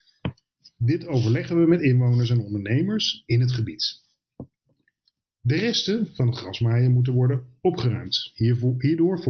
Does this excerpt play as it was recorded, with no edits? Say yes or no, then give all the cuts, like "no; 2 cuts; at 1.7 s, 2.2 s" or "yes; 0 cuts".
yes; 0 cuts